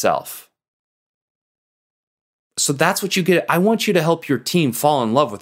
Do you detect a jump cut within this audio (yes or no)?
no